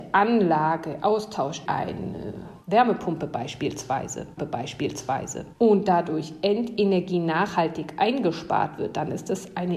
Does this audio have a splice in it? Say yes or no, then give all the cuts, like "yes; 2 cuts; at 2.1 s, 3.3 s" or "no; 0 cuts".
yes; 2 cuts; at 1.7 s, 4.4 s